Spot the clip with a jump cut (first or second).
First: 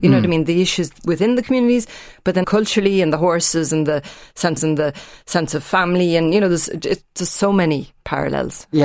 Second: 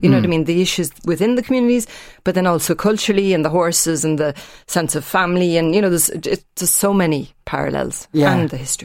first